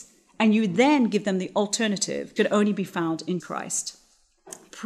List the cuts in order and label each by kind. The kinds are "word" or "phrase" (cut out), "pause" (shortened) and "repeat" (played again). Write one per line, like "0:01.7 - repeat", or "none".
0:02.4 - word
0:03.4 - word